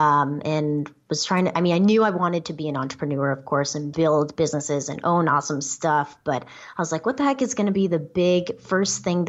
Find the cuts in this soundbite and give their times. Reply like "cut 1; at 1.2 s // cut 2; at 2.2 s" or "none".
none